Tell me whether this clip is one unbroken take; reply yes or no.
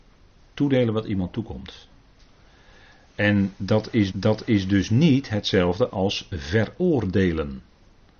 no